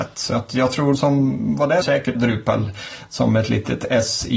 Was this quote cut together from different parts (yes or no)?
yes